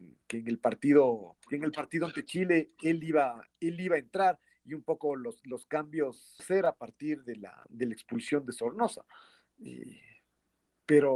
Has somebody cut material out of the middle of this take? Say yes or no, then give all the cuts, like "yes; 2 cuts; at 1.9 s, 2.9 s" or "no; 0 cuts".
yes; 2 cuts; at 1.4 s, 6.4 s